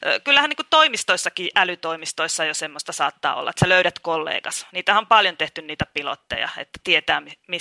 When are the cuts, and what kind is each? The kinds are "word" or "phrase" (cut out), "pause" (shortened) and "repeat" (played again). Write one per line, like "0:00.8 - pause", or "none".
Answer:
none